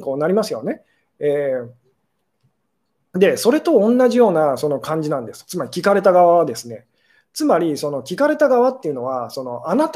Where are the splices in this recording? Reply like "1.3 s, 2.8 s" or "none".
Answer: none